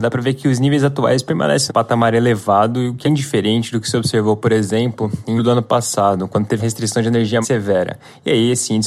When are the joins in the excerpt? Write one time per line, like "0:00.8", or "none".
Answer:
0:01.7
0:03.0
0:05.4
0:06.6
0:07.4